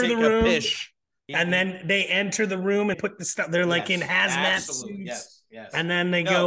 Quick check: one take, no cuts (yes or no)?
no